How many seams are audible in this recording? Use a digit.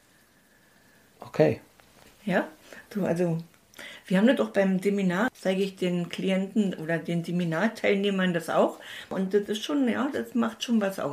1